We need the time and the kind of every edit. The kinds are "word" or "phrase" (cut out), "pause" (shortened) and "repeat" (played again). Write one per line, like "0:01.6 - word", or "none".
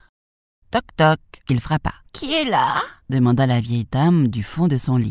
0:01.4 - pause
0:02.0 - pause
0:03.0 - pause

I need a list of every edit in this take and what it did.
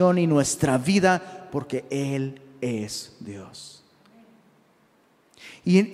none

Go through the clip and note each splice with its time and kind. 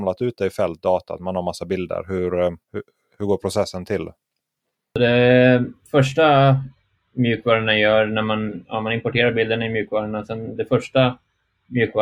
0:02.6 - pause
0:05.8 - pause

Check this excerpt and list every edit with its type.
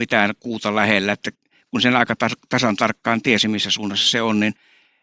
none

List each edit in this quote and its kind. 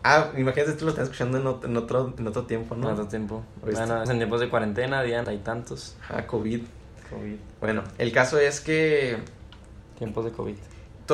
0:04.1 - word
0:05.2 - word

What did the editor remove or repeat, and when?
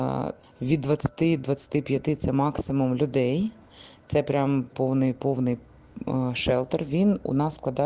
0:01.4 - word
0:04.7 - word

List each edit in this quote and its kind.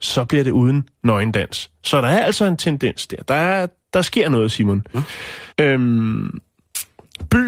0:05.5 - pause

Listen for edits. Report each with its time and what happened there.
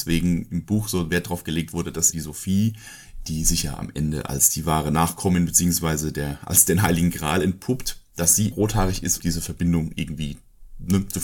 0:02.1 - word
0:08.5 - word
0:09.2 - word

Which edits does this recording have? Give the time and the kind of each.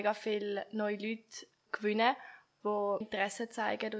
0:01.7 - word
0:03.0 - word

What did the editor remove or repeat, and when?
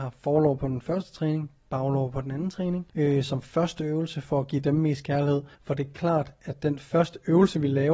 0:02.9 - pause
0:05.5 - pause

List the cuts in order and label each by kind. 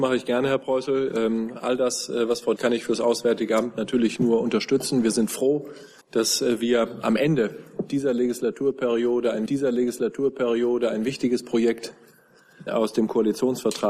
0:02.6 - phrase
0:06.0 - pause
0:09.5 - repeat
0:12.7 - word

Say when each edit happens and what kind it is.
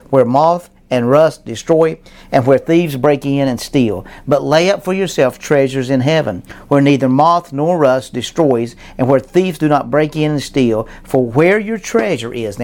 none

